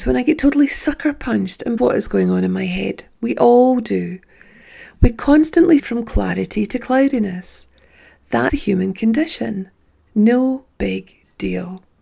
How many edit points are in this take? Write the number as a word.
three